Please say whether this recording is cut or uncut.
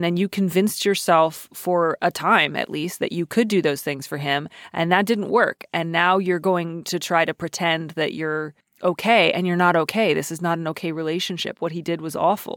cut